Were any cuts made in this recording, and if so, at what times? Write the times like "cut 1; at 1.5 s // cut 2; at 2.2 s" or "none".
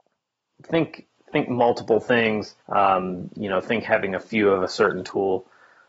cut 1; at 2.6 s // cut 2; at 3.8 s